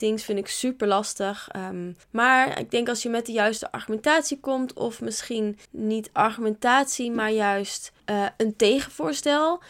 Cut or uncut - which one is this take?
cut